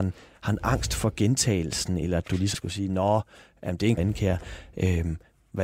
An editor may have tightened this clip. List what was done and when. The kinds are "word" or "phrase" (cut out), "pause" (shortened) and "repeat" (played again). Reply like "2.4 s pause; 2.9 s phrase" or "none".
2.5 s word; 4.0 s phrase